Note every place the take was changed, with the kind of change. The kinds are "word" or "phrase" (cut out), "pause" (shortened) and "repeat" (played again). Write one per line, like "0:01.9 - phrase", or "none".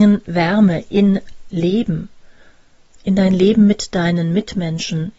0:01.5 - word